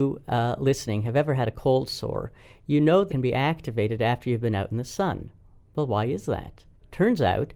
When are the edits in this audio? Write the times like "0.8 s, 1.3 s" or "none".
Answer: 3.1 s